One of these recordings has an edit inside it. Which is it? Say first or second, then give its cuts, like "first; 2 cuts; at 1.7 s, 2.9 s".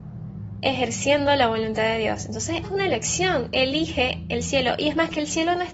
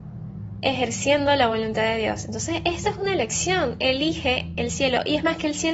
first; 1 cut; at 2.6 s